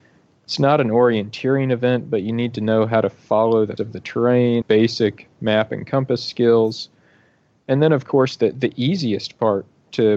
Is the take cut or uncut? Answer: cut